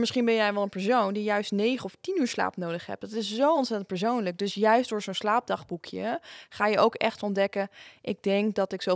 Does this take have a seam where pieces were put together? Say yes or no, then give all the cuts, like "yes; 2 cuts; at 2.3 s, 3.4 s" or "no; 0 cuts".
no; 0 cuts